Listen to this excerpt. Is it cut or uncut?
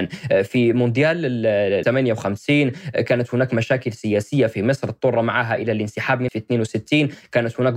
cut